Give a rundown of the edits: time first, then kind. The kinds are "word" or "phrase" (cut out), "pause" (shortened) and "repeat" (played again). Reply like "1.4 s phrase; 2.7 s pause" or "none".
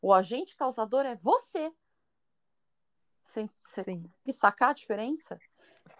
4.3 s word